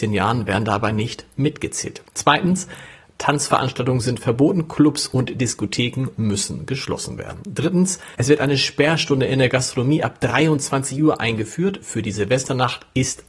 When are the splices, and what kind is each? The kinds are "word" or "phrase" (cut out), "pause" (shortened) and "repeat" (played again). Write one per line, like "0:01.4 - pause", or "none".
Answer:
0:08.1 - pause